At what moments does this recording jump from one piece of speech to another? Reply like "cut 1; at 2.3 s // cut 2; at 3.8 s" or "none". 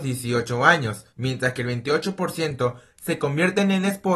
cut 1; at 1.1 s